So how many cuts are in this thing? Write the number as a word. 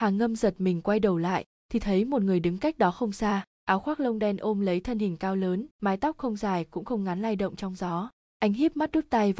two